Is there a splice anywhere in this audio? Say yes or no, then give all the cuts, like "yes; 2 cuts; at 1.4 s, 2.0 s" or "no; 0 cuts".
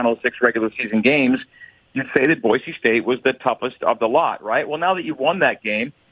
no; 0 cuts